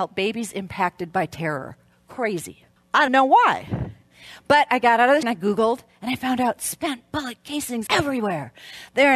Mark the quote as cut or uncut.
cut